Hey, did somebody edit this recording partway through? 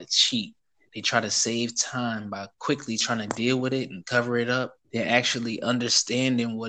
yes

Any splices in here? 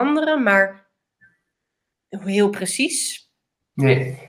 no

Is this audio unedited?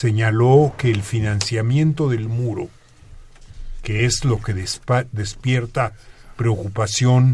yes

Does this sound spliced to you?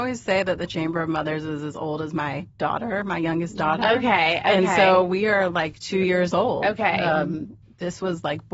no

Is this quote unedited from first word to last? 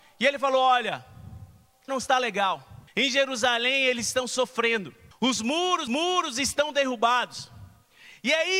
no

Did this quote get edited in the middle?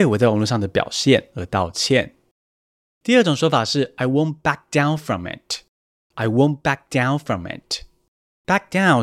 no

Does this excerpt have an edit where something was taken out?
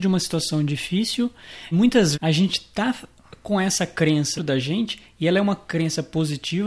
yes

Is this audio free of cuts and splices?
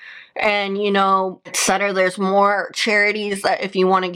yes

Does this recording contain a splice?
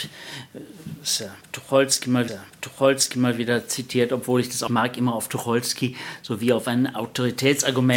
yes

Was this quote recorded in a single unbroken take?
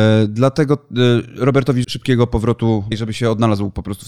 no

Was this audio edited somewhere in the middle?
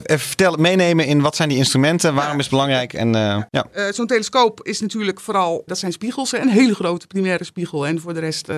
yes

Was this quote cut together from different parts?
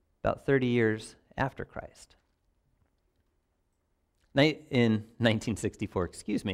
no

